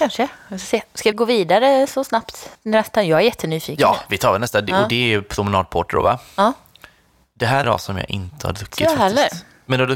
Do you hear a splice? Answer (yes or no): yes